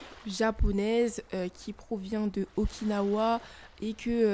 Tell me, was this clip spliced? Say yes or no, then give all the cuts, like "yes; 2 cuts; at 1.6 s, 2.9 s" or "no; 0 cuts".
no; 0 cuts